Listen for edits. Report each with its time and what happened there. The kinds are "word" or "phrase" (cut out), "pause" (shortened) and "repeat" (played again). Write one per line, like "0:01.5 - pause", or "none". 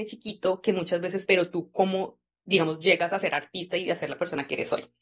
0:01.3 - phrase